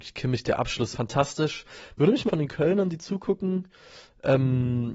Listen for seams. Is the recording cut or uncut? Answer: cut